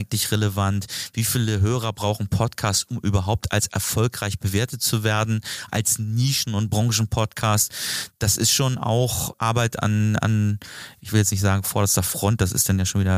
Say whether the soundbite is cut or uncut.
cut